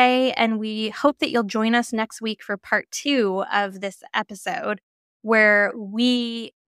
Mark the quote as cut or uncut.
uncut